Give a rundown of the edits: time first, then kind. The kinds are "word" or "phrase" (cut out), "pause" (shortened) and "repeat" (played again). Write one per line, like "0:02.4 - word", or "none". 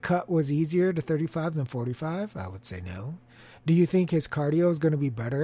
none